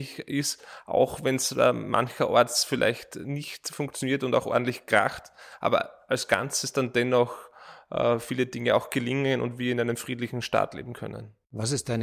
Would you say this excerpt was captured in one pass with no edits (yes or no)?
yes